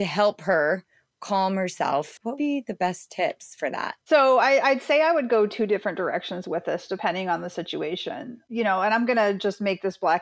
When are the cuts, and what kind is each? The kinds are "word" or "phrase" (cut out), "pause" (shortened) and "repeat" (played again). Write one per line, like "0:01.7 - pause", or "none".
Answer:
0:02.4 - word

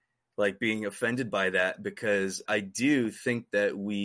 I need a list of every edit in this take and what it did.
0:02.5 - word

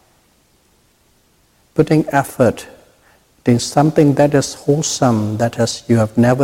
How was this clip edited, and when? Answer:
none

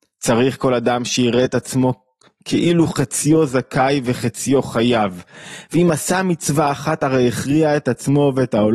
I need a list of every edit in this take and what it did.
none

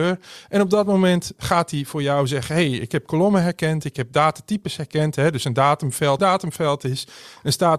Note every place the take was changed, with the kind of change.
0:06.2 - phrase

